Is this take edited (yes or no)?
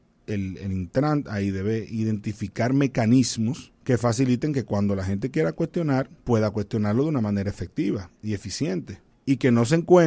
yes